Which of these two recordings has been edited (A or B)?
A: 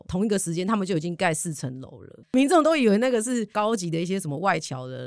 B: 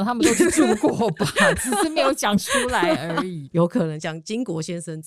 A